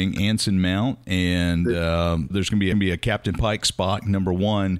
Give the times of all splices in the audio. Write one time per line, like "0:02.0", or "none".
0:02.3
0:02.7